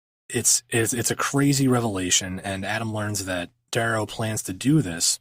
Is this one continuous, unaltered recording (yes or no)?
yes